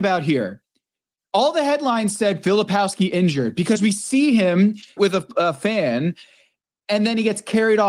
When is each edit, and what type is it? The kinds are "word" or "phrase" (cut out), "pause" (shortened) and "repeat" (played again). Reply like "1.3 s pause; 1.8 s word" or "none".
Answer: 5.0 s phrase